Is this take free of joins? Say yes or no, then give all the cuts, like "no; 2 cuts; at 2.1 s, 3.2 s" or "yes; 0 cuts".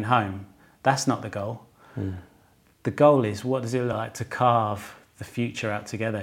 yes; 0 cuts